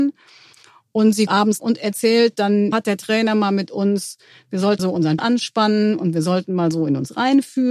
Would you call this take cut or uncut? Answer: cut